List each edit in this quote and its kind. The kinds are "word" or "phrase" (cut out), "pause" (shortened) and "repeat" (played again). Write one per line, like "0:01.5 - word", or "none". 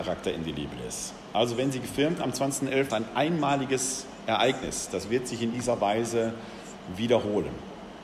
0:02.2 - word
0:02.9 - phrase
0:05.5 - phrase